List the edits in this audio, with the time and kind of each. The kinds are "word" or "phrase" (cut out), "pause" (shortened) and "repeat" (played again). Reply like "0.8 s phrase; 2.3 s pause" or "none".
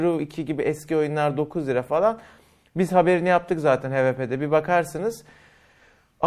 none